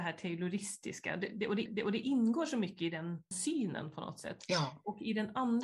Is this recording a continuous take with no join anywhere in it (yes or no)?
no